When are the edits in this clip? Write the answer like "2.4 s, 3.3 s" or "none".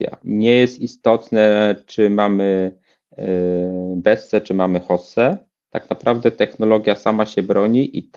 none